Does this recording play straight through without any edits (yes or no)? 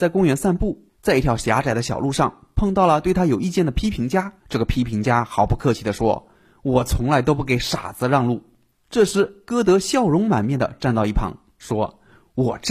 no